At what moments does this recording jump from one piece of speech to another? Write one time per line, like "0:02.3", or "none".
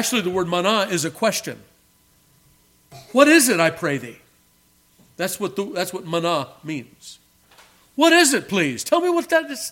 none

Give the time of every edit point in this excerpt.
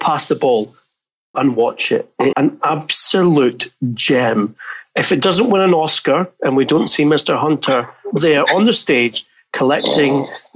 0:01.3
0:02.3
0:08.1

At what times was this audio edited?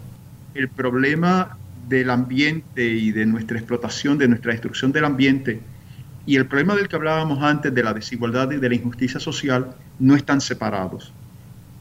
none

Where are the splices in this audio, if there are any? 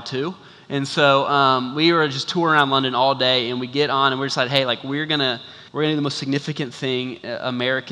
0:05.7

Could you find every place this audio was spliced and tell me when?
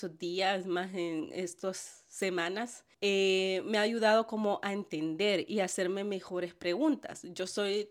0:02.9

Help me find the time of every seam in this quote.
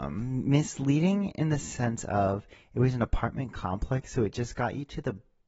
none

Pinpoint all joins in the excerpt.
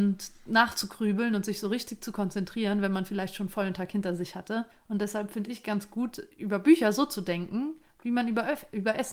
0:04.7

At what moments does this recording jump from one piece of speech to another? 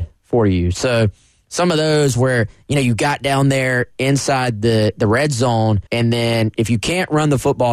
0:05.9

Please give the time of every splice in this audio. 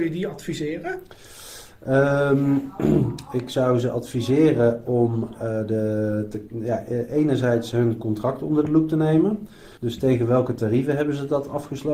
0:09.8

